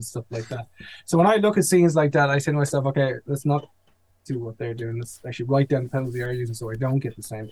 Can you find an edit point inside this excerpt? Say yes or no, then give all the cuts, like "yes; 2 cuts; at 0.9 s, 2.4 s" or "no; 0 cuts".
no; 0 cuts